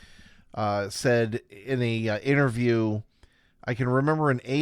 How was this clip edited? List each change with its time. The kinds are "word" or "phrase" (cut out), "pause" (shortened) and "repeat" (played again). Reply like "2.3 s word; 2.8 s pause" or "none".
none